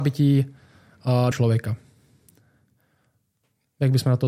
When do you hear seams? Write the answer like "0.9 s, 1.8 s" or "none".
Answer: 1.3 s